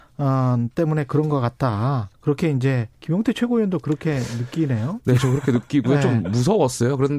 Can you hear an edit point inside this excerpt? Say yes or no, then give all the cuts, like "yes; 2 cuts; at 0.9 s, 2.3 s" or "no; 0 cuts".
yes; 2 cuts; at 2.1 s, 2.9 s